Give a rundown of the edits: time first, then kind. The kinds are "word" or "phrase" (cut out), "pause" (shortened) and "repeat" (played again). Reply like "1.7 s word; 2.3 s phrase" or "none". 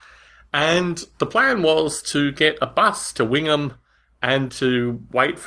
4.5 s word